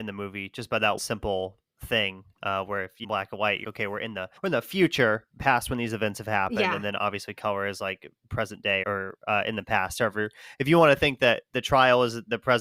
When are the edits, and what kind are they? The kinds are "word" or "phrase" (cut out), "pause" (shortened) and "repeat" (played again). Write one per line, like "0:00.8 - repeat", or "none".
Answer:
0:01.0 - word
0:03.0 - phrase
0:03.6 - word
0:04.4 - pause
0:05.3 - pause
0:08.8 - word